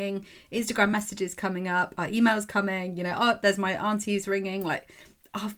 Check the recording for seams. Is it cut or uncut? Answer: uncut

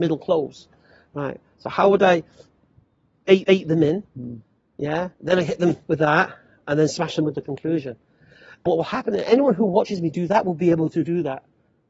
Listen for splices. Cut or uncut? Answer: cut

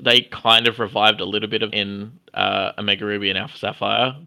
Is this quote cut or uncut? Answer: cut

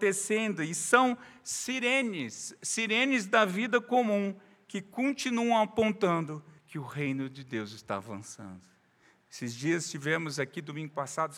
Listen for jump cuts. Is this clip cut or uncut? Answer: cut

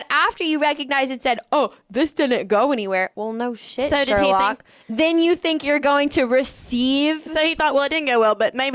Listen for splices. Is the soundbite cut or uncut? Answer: uncut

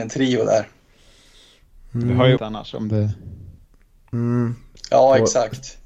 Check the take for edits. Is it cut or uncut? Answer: cut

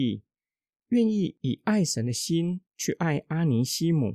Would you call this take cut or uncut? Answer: cut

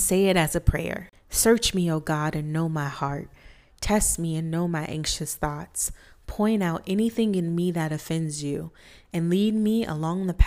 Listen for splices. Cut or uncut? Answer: uncut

